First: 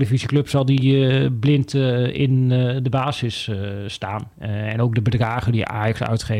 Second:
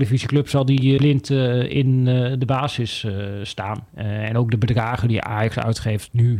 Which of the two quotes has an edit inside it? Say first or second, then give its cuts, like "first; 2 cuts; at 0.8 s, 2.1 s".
second; 1 cut; at 1.0 s